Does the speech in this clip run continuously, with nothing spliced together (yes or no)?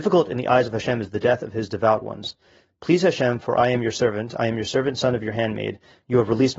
yes